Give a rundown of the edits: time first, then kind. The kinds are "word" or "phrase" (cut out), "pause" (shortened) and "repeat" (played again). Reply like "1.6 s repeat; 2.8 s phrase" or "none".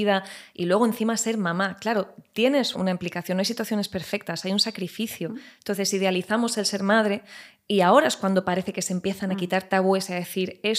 2.7 s word